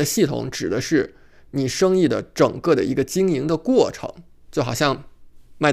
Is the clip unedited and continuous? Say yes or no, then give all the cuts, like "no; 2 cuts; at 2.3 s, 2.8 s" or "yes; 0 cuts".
yes; 0 cuts